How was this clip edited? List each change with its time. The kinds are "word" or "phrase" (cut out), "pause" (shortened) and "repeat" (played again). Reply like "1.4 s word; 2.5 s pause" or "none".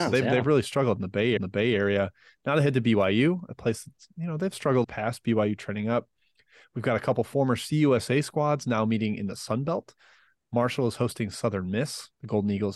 1.4 s repeat; 4.8 s phrase